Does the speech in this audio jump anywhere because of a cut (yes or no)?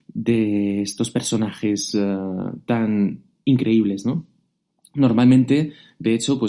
no